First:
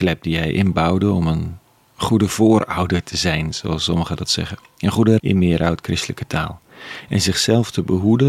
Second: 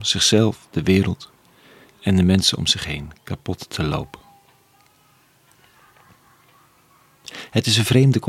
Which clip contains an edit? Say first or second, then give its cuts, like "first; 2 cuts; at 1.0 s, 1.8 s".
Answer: first; 1 cut; at 5.2 s